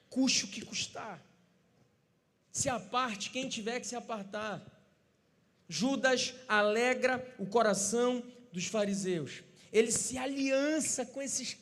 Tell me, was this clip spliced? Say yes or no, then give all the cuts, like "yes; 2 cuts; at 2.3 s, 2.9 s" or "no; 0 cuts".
no; 0 cuts